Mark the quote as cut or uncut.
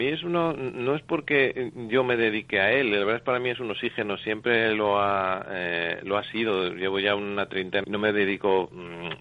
cut